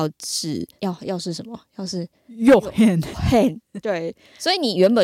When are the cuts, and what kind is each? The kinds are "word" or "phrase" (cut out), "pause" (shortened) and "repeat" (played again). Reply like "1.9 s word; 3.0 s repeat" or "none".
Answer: 3.1 s word